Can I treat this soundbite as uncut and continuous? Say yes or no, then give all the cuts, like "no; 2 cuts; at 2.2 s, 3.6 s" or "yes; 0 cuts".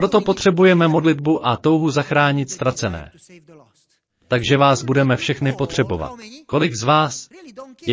yes; 0 cuts